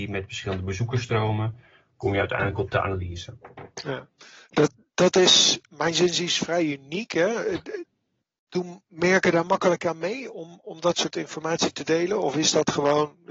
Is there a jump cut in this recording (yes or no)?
no